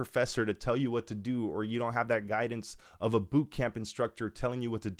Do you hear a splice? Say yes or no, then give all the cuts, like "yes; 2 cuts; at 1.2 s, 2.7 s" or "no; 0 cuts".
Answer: no; 0 cuts